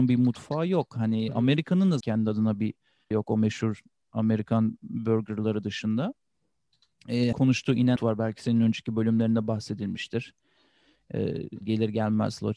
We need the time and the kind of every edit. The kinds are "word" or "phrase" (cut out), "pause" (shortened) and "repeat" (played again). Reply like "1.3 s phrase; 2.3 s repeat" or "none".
2.0 s word; 3.1 s word; 7.3 s word; 8.0 s word; 11.6 s word